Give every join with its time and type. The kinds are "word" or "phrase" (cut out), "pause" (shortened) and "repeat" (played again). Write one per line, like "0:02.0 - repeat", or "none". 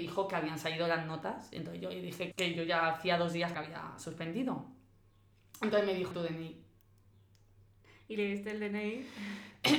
0:02.3 - word
0:03.5 - word
0:06.1 - word